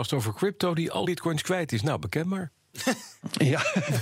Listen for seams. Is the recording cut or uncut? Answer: cut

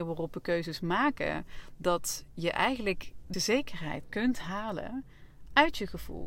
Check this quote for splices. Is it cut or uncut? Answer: cut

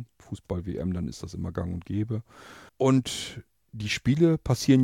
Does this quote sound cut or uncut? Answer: cut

